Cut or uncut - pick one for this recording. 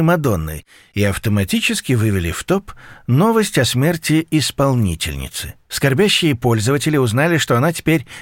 uncut